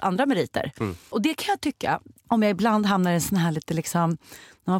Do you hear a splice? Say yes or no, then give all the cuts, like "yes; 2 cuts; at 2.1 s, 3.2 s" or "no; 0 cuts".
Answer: no; 0 cuts